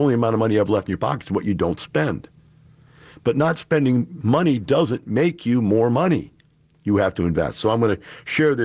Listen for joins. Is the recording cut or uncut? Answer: uncut